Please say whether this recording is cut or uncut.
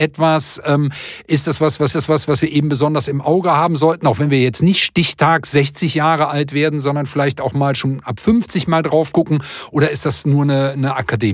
cut